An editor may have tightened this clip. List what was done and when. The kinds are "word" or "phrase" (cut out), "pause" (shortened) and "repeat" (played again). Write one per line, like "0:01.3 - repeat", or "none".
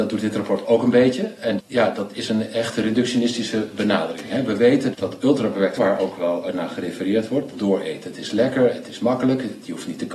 0:01.6 - word
0:04.9 - word
0:05.8 - word
0:07.5 - phrase

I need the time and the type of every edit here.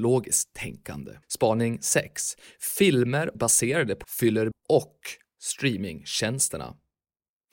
0:01.2 - pause
0:03.3 - phrase
0:04.0 - word
0:04.5 - word

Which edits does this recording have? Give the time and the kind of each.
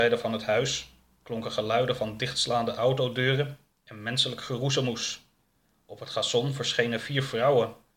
none

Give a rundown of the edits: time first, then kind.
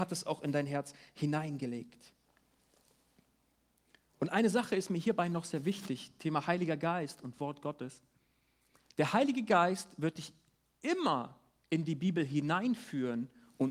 none

